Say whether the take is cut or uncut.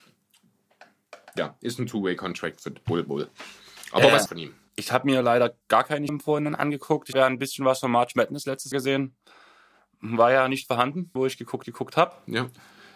cut